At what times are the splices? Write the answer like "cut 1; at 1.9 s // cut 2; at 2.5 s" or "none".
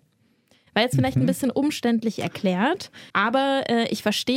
cut 1; at 3.1 s